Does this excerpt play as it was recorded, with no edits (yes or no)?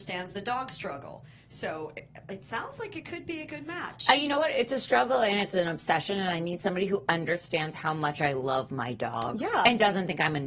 yes